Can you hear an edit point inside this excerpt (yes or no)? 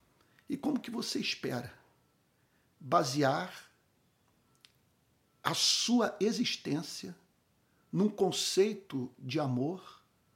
no